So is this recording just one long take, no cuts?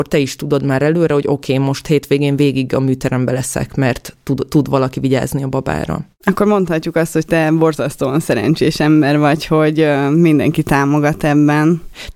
yes; 0 cuts

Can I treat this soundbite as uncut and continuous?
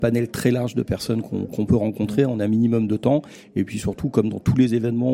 yes; 0 cuts

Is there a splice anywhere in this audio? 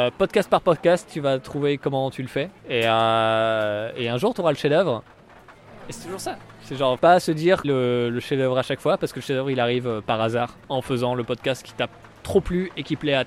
yes; 4 cuts; at 2.6 s, 7.0 s, 7.6 s, 10.6 s

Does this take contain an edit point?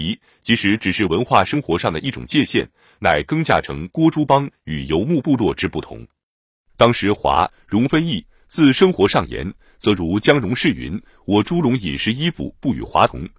no; 0 cuts

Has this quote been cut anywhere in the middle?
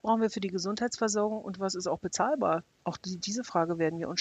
no; 0 cuts

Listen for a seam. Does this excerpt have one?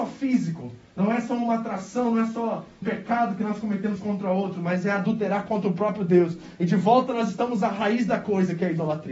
yes; 1 cut; at 2.8 s

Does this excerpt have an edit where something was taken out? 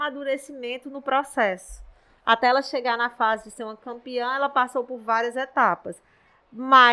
no; 0 cuts

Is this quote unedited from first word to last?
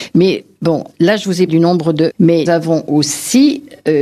no; 4 cuts; at 0.9 s, 1.5 s, 2.1 s, 2.5 s

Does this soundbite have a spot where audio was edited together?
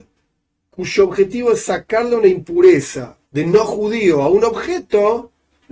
yes; 1 cut; at 3.3 s

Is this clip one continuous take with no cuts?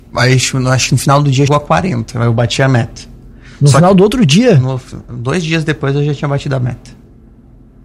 no; 1 cut; at 1.5 s

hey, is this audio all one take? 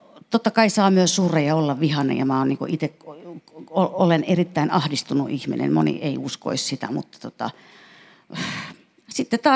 yes; 0 cuts

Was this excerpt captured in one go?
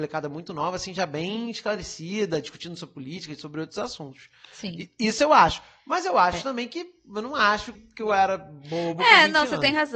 no; 1 cut; at 7.7 s

